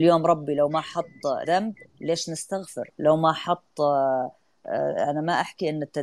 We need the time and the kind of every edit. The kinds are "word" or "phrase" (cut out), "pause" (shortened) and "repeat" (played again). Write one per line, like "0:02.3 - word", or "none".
0:01.4 - phrase
0:01.9 - pause
0:02.9 - pause